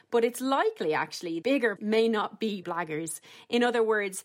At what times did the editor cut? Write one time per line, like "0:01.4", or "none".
0:01.4
0:01.8
0:02.6